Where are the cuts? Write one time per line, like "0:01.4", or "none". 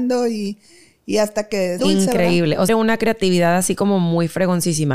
0:01.8
0:02.7

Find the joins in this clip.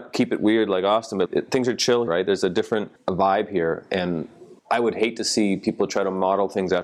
0:01.3
0:02.1
0:03.0
0:04.6

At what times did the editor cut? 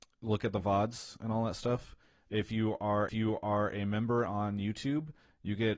0:03.1

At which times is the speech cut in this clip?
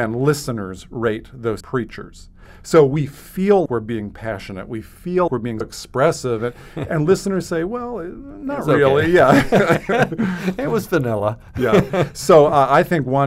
0:01.6
0:03.7
0:05.3
0:05.6

